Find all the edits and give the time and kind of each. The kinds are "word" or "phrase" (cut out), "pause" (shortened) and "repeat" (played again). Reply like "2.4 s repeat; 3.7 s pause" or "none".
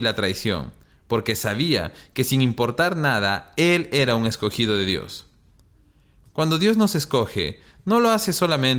none